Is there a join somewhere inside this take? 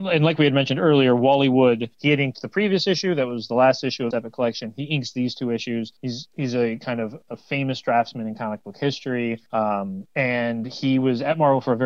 yes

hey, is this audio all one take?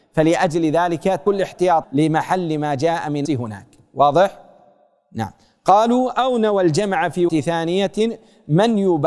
no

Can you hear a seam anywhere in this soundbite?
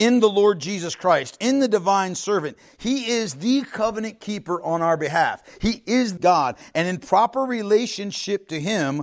yes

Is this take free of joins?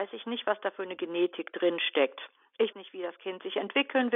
no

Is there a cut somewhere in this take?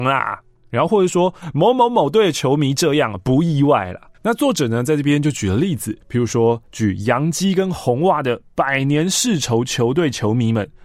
yes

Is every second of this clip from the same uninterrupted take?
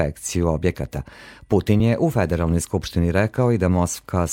yes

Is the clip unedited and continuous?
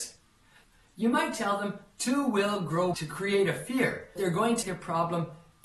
no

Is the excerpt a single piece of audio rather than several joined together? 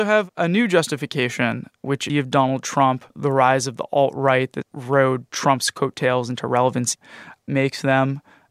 no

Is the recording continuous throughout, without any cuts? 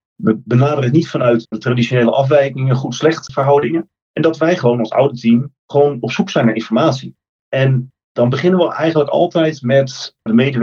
yes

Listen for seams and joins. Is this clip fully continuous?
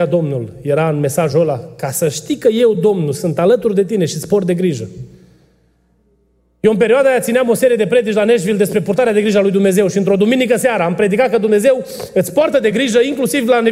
yes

